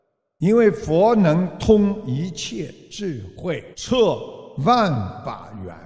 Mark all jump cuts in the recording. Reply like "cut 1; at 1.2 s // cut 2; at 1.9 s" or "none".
cut 1; at 3.7 s